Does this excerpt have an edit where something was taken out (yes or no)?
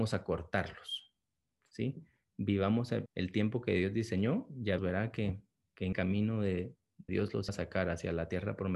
yes